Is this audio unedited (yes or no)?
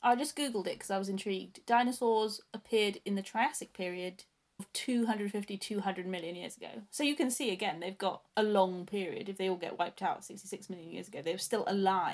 no